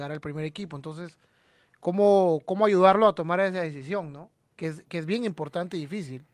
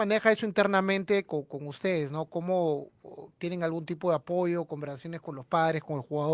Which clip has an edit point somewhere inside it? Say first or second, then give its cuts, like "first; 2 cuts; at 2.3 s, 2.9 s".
second; 1 cut; at 3.4 s